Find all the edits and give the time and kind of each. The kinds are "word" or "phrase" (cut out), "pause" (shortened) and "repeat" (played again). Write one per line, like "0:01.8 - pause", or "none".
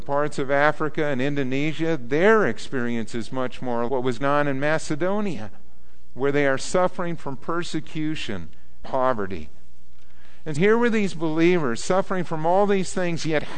0:03.9 - word
0:04.2 - word
0:08.8 - word
0:10.6 - word